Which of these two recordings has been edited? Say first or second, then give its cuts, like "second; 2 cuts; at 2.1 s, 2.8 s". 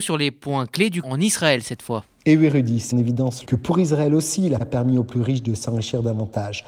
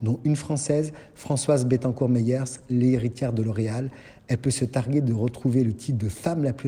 first; 5 cuts; at 1.0 s, 2.2 s, 2.9 s, 3.4 s, 4.6 s